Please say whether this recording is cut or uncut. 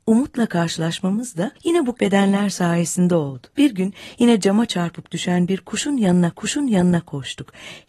cut